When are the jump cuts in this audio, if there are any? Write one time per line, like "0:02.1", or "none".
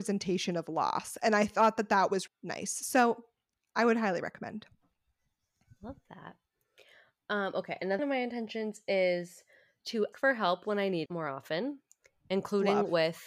0:02.3
0:08.0
0:10.1
0:11.1